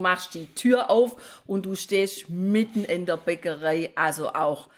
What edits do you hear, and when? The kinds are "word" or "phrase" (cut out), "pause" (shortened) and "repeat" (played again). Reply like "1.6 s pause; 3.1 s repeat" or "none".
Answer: none